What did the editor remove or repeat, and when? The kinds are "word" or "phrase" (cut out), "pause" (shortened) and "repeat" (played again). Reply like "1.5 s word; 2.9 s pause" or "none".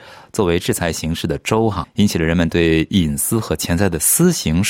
1.8 s word